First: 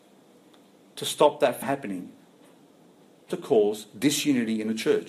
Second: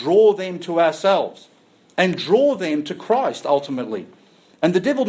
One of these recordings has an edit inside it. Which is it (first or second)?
first